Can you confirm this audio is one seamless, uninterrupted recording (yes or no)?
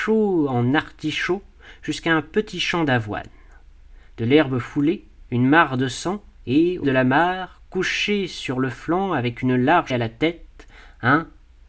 no